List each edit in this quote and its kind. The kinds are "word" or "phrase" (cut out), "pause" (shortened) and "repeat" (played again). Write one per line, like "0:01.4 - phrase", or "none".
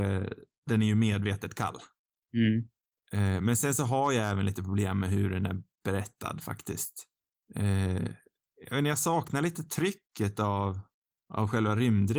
none